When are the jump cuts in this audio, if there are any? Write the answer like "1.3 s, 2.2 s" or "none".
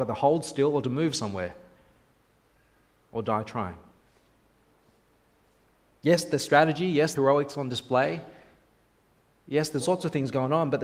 7.1 s, 9.8 s